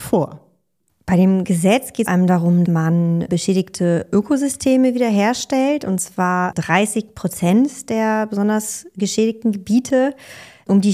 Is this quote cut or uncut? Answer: cut